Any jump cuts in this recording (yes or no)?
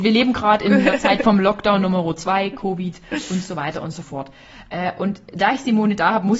no